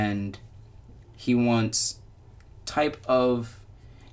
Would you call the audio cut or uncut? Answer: cut